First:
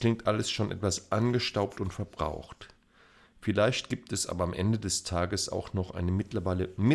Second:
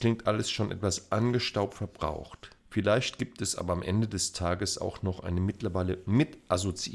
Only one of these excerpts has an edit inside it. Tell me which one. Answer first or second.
second